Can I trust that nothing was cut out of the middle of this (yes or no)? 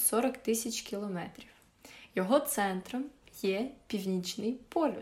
yes